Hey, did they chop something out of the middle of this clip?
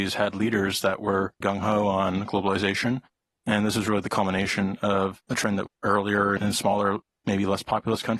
yes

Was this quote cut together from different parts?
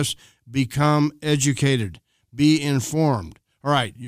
no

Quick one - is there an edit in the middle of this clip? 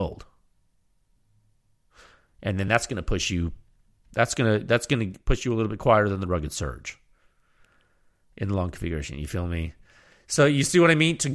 no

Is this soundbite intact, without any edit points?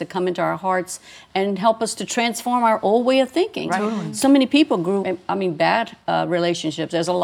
no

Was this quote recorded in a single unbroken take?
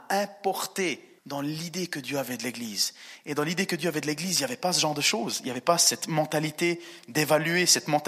no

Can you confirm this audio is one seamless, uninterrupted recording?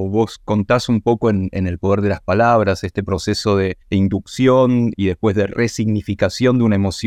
no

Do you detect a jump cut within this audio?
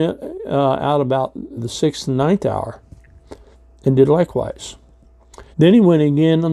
yes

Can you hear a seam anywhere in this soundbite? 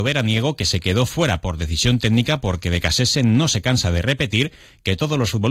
no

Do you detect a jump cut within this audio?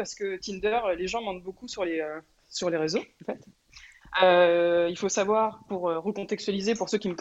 no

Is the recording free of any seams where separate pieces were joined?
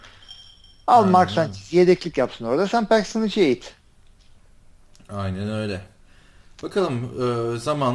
yes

